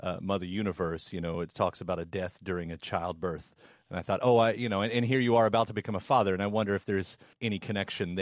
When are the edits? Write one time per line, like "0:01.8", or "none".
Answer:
none